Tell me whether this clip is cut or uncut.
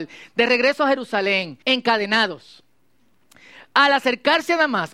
cut